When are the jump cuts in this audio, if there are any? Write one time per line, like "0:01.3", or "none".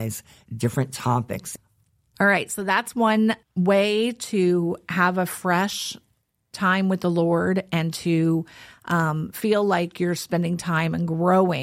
none